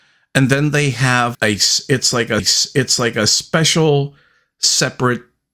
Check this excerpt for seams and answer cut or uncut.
cut